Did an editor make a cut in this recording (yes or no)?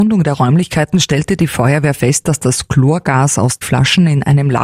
yes